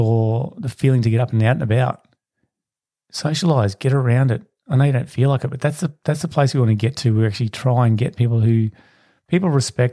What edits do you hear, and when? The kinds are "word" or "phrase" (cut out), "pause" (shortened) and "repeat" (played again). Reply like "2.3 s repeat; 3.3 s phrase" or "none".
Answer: none